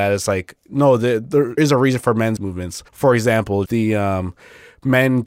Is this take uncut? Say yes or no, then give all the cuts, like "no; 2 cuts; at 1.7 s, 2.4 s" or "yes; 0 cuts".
no; 4 cuts; at 1.6 s, 2.4 s, 2.9 s, 3.7 s